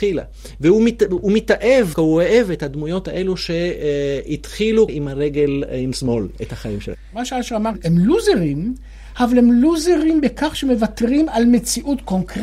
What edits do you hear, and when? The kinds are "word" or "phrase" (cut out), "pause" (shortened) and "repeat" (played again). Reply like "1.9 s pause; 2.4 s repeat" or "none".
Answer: 1.9 s word; 4.9 s word; 5.9 s word